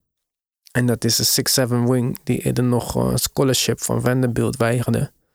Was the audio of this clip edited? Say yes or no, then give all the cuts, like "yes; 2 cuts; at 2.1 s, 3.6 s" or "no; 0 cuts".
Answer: no; 0 cuts